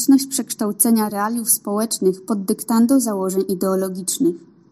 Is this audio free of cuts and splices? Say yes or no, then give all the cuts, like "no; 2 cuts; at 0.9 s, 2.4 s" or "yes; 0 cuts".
yes; 0 cuts